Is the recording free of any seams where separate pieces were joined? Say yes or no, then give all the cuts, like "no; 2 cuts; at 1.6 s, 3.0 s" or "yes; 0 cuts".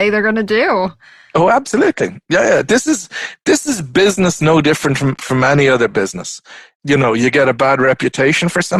yes; 0 cuts